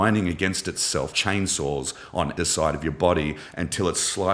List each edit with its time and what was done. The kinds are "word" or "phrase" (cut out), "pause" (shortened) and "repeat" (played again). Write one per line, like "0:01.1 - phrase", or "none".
0:01.1 - word
0:02.4 - word